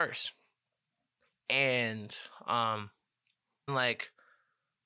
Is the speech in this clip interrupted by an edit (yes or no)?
yes